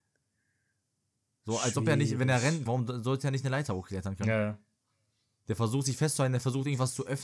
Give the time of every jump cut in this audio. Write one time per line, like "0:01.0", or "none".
0:02.7